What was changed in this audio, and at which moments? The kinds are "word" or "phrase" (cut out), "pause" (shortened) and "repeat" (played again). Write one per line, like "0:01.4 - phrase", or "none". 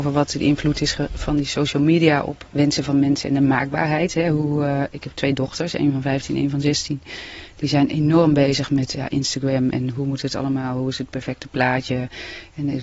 0:02.5 - word
0:08.9 - word